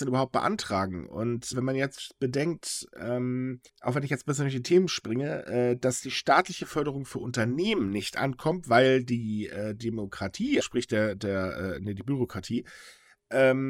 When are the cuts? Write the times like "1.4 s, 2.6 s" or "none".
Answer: 1.5 s, 3.7 s, 10.6 s